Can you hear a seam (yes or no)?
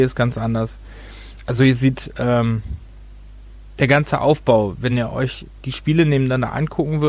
no